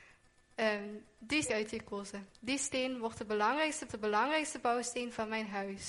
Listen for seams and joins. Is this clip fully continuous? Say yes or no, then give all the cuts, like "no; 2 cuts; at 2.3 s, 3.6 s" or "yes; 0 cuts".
no; 3 cuts; at 1.4 s, 2.3 s, 3.9 s